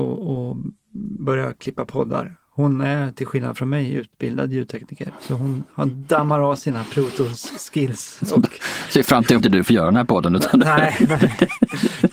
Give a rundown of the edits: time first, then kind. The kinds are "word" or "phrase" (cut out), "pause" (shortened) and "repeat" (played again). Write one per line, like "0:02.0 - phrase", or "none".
0:09.4 - word

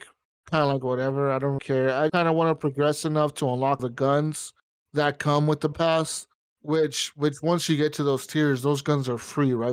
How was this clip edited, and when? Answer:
0:01.6 - word
0:02.1 - word
0:03.8 - word
0:05.7 - word

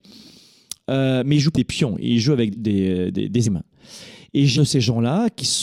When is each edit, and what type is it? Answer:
0:01.5 - word
0:02.5 - word
0:03.4 - word
0:04.5 - word

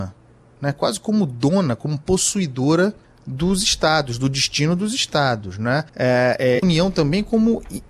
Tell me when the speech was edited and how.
0:03.0 - pause
0:05.9 - pause
0:06.6 - phrase

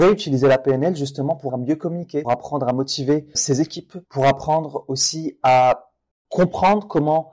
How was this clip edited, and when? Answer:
0:01.5 - word
0:02.2 - word
0:03.3 - word
0:04.0 - pause

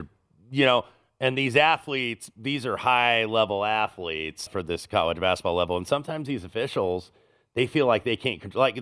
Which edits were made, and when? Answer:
0:04.5 - word

